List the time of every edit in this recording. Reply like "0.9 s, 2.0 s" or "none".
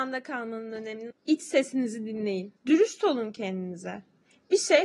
1.1 s, 2.6 s